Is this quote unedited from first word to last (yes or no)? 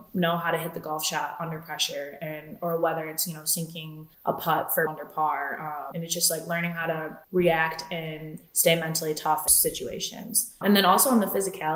no